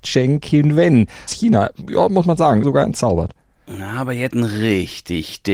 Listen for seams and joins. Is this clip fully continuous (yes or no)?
no